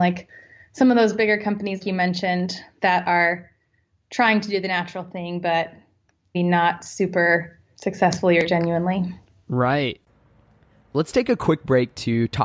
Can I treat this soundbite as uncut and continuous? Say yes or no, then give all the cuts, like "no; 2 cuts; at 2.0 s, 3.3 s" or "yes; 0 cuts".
no; 3 cuts; at 1.8 s, 6.3 s, 7.7 s